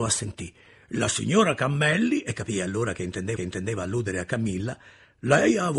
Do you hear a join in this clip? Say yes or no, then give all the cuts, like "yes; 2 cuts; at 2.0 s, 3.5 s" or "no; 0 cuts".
yes; 1 cut; at 3.4 s